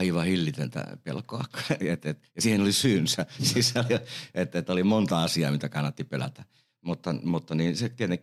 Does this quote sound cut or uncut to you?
uncut